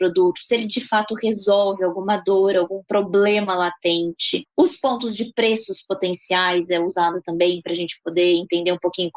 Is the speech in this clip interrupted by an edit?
no; 0 cuts

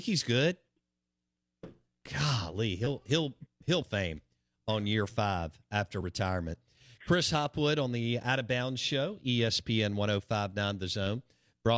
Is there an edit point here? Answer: yes; 1 cut; at 3.8 s

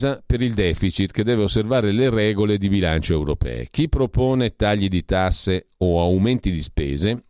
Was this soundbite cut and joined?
no; 0 cuts

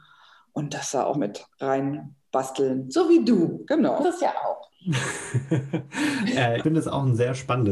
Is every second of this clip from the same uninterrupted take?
no; 3 cuts; at 1.1 s, 4.0 s, 6.6 s

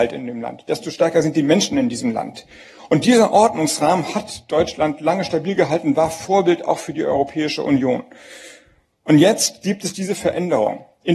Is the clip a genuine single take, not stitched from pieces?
yes; 0 cuts

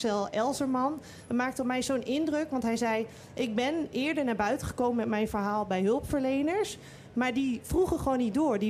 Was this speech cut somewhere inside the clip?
no; 0 cuts

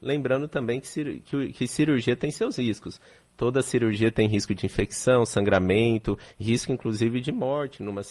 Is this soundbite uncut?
yes; 0 cuts

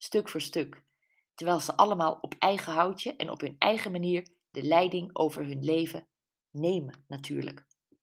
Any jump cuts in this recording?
no; 0 cuts

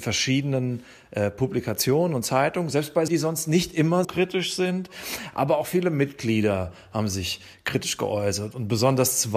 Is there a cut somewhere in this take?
yes; 2 cuts; at 3.1 s, 4.0 s

